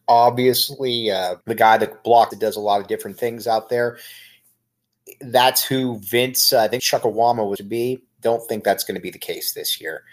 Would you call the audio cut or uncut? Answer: cut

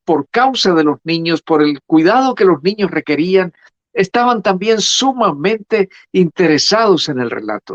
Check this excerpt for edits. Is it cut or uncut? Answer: uncut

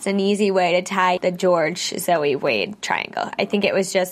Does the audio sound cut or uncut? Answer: cut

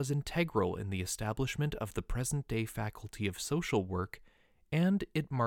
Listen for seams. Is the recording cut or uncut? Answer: uncut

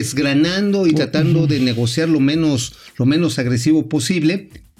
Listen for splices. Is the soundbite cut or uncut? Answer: uncut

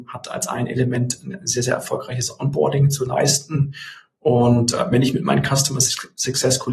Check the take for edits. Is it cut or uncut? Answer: uncut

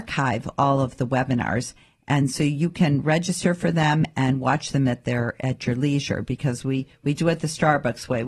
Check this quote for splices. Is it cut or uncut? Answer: uncut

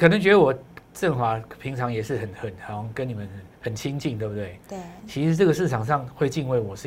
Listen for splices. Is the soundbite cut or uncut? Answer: cut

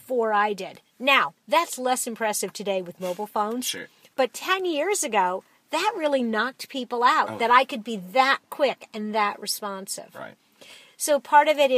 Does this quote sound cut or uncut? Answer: uncut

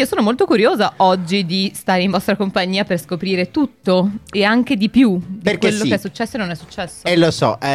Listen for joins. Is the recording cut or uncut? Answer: uncut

